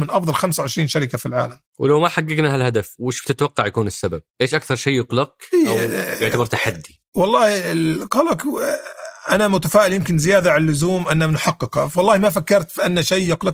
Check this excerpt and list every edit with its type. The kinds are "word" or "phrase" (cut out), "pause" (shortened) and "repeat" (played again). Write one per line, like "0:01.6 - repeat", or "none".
0:04.3 - pause
0:07.1 - pause